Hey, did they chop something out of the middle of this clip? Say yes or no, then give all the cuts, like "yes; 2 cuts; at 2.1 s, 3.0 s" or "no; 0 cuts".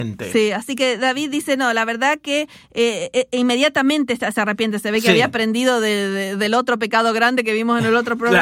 no; 0 cuts